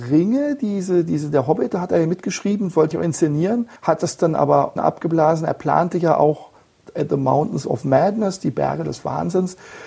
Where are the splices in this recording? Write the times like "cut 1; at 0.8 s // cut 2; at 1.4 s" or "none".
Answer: cut 1; at 2.9 s // cut 2; at 3.8 s // cut 3; at 4.8 s